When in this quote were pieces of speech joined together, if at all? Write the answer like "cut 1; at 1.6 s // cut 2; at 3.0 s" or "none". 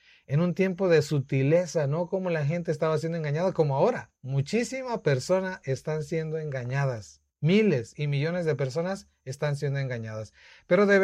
cut 1; at 4.2 s // cut 2; at 7.3 s

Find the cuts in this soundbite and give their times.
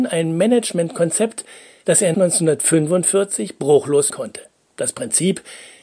cut 1; at 2.1 s // cut 2; at 4.1 s

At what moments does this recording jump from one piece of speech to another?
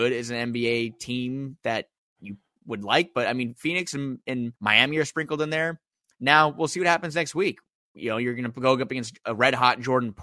cut 1; at 4.6 s

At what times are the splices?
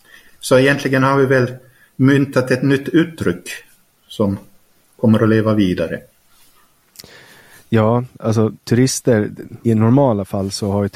cut 1; at 9.6 s

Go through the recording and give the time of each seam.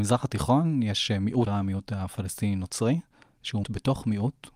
cut 1; at 1.5 s // cut 2; at 3.6 s

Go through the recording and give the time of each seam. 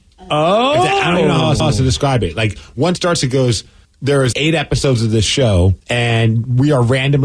cut 1; at 1.6 s // cut 2; at 3.0 s // cut 3; at 3.8 s // cut 4; at 4.3 s // cut 5; at 5.8 s

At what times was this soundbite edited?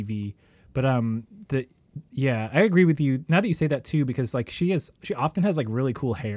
cut 1; at 2.0 s // cut 2; at 5.0 s

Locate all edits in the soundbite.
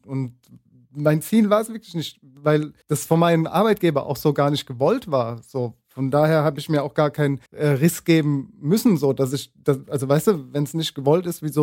cut 1; at 2.8 s // cut 2; at 7.5 s

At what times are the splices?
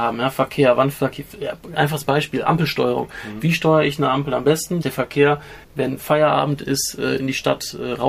cut 1; at 4.8 s // cut 2; at 5.6 s

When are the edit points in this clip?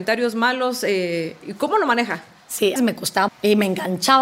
cut 1; at 2.8 s // cut 2; at 3.3 s

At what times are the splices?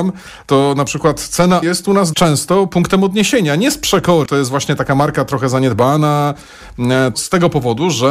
cut 1; at 1.6 s // cut 2; at 2.1 s // cut 3; at 4.3 s // cut 4; at 7.1 s

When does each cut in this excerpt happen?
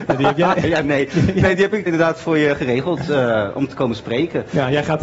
cut 1; at 1.9 s

